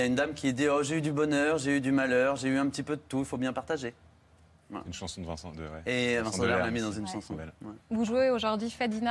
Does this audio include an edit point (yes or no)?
yes